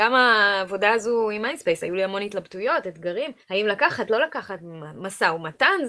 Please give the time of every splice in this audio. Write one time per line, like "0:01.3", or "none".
0:03.4

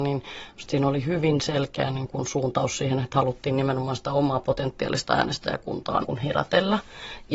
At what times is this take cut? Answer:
0:06.0

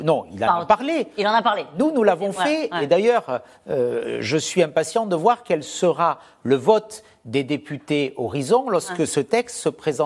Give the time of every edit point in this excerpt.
none

